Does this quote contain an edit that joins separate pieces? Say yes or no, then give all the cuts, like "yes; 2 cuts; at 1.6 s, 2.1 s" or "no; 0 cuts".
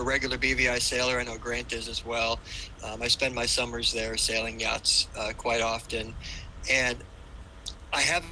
no; 0 cuts